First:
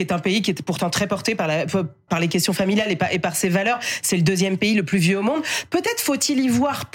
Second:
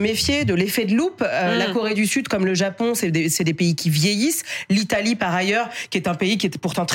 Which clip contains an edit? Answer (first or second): first